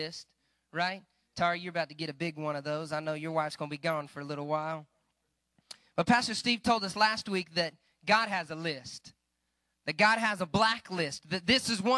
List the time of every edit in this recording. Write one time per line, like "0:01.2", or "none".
none